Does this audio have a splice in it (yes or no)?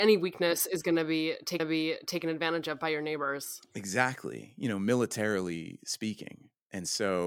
yes